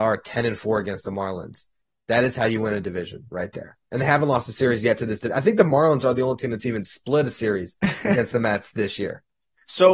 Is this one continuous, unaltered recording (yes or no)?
yes